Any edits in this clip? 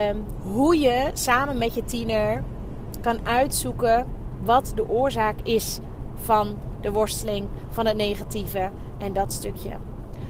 no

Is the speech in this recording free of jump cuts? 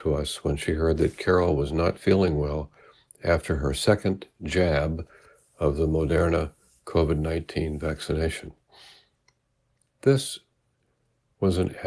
yes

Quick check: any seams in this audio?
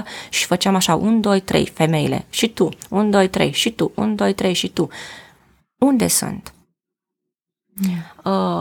no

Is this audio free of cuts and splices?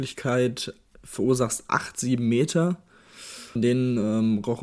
no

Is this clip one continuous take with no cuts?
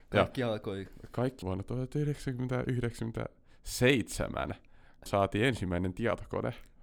no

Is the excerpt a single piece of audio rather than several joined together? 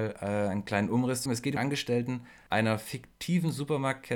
no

